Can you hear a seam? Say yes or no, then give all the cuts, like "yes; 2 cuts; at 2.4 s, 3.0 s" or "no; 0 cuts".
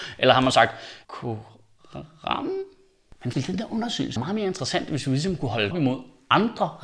yes; 4 cuts; at 1.0 s, 3.3 s, 4.2 s, 5.7 s